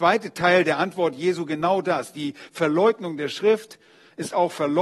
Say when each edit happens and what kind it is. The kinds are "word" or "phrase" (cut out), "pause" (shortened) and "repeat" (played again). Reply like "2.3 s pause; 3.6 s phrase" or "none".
none